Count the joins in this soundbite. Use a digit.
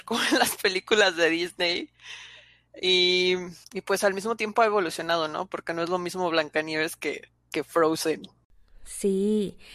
2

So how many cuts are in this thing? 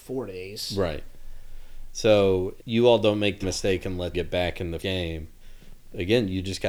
4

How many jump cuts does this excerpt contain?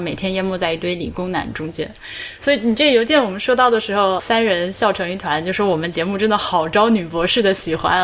1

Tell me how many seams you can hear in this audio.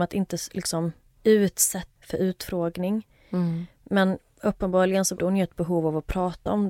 2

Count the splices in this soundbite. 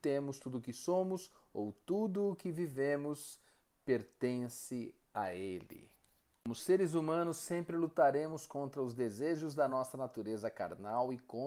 0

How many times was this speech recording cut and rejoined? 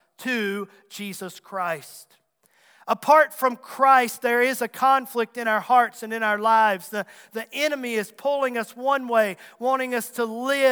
0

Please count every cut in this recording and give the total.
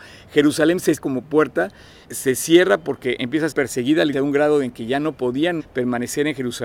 5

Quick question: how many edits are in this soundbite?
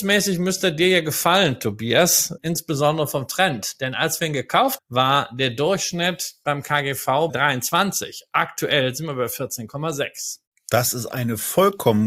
3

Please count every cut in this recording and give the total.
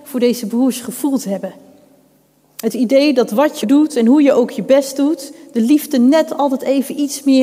1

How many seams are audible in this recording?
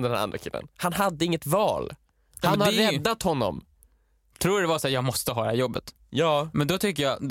0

